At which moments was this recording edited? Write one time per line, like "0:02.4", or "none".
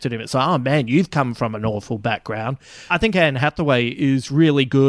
0:02.9